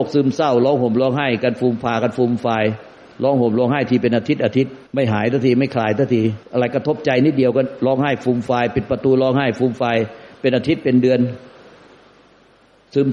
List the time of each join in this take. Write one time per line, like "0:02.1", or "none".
0:04.9
0:06.4